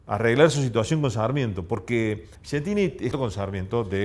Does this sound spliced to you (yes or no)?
yes